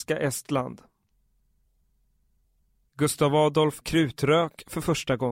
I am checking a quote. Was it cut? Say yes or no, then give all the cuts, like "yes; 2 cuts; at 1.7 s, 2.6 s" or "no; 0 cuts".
yes; 1 cut; at 3.8 s